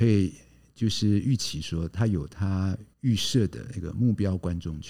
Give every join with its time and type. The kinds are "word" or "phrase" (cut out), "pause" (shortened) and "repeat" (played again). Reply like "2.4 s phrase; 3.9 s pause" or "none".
2.9 s pause